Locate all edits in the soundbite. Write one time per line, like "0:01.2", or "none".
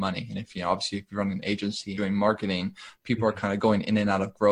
0:01.9